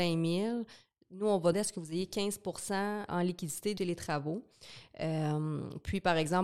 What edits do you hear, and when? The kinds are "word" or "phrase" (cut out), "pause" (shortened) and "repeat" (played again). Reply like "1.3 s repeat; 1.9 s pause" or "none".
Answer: 1.5 s word; 3.1 s word; 3.8 s phrase